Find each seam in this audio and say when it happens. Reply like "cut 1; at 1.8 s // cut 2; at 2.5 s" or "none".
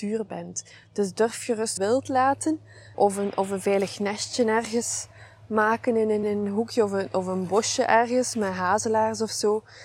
cut 1; at 1.8 s // cut 2; at 2.9 s // cut 3; at 6.2 s